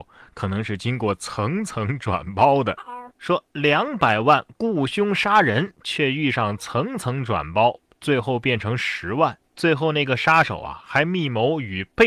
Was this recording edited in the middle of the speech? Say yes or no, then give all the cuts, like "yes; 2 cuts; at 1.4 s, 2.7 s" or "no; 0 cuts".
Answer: yes; 1 cut; at 9.5 s